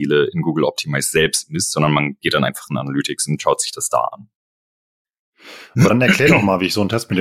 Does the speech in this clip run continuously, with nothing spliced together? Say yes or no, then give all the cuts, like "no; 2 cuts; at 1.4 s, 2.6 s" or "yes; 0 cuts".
yes; 0 cuts